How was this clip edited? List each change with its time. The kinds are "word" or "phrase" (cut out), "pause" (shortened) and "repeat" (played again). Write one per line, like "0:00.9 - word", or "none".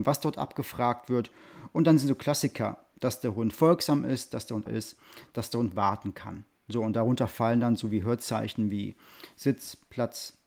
0:04.7 - word